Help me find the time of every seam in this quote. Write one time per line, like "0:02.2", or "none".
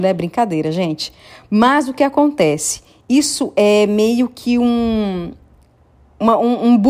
none